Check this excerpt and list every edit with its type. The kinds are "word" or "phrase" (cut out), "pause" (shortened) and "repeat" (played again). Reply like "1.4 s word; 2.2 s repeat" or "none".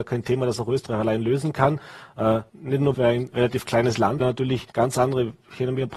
2.5 s pause; 2.9 s word; 4.2 s phrase; 4.7 s pause